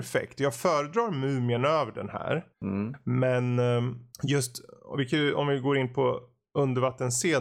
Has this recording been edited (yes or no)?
yes